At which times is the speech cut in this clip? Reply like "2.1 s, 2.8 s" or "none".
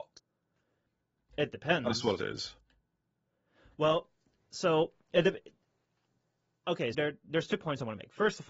2.2 s, 6.9 s